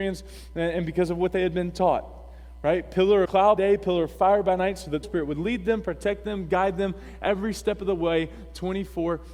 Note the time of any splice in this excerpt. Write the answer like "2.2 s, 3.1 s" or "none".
3.2 s, 3.6 s, 5.0 s